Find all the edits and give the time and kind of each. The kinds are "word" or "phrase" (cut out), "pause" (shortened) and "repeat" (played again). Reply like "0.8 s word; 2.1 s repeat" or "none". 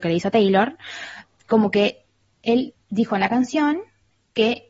none